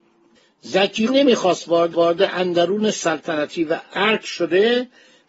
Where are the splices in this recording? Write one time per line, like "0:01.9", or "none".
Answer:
0:01.1
0:01.9

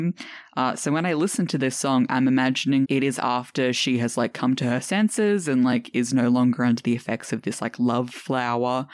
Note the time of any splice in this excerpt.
0:02.8

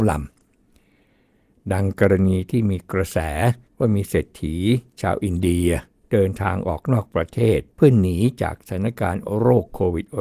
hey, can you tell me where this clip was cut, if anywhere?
0:03.7
0:07.7

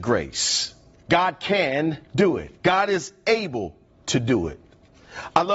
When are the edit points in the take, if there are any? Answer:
0:00.9
0:02.0
0:02.6

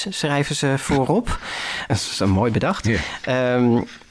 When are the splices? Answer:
0:01.9

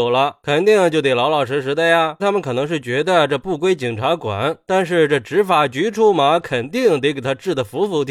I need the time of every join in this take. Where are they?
0:02.2

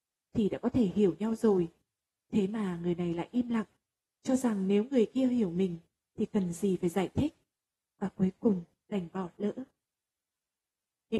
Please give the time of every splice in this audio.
none

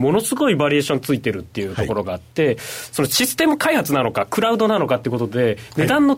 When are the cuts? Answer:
none

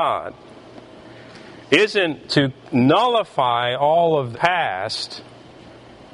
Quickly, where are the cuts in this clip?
0:02.3
0:04.3

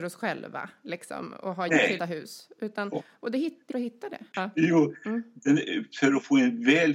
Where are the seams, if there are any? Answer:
0:01.7
0:02.0
0:03.7

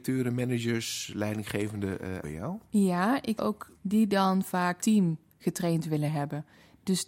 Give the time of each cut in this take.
0:02.2
0:03.4
0:03.8
0:04.8

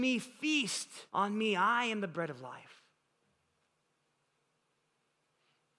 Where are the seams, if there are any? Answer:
0:01.1

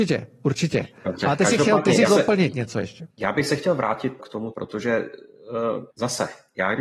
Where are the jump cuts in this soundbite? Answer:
0:02.1
0:03.1
0:04.2
0:04.5
0:05.9

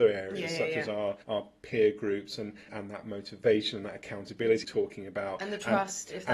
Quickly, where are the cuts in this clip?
0:01.2
0:02.7
0:04.6

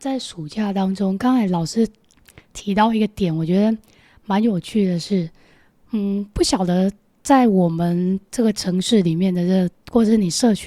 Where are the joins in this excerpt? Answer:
none

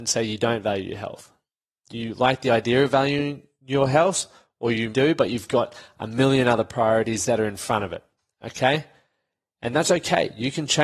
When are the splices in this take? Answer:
0:04.9

